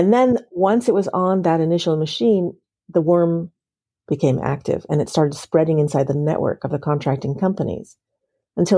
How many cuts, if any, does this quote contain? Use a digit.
0